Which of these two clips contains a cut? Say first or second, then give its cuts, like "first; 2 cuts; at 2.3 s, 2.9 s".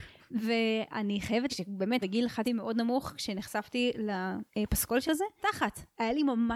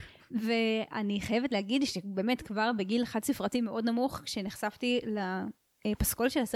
first; 6 cuts; at 1.5 s, 2.0 s, 2.4 s, 4.5 s, 5.0 s, 5.4 s